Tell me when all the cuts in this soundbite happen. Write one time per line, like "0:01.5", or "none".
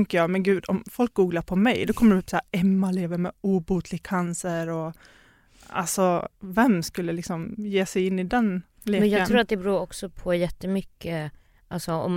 0:06.3